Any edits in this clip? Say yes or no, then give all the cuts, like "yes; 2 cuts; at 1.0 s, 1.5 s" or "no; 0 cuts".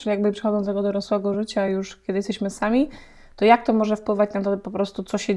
no; 0 cuts